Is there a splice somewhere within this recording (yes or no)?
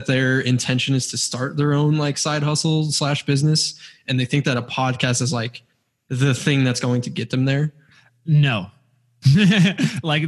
no